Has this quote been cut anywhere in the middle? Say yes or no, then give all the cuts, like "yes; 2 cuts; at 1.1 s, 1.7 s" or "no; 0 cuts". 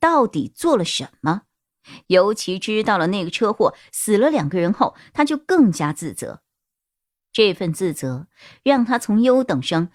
no; 0 cuts